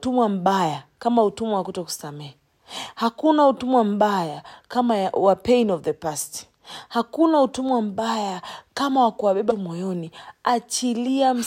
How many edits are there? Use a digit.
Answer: 1